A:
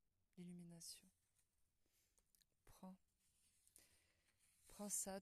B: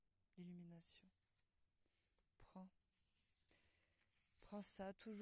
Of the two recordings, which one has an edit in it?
B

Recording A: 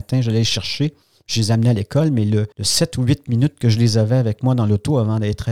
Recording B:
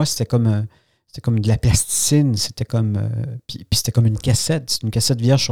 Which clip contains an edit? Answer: A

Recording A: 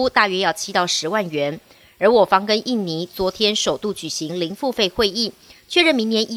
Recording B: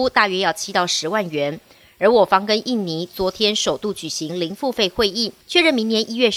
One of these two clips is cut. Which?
B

